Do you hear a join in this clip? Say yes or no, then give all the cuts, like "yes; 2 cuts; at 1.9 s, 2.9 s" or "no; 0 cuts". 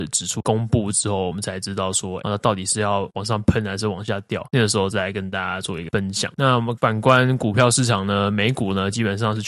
yes; 1 cut; at 2.2 s